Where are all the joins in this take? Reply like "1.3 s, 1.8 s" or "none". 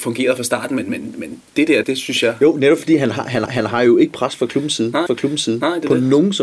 1.5 s, 1.8 s, 3.5 s, 5.1 s